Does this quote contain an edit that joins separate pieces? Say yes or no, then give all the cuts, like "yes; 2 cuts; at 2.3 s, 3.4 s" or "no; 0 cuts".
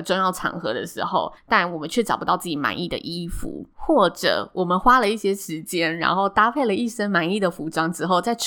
yes; 2 cuts; at 1.4 s, 3.7 s